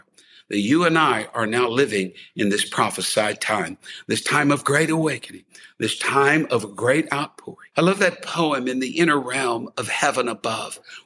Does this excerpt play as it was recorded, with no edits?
no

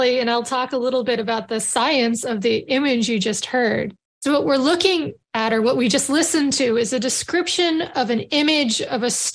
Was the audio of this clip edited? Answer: yes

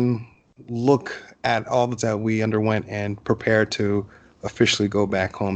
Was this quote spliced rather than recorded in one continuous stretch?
yes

